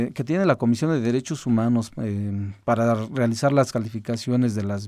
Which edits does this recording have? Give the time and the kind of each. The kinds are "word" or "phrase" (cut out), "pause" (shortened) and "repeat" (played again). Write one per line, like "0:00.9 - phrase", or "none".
none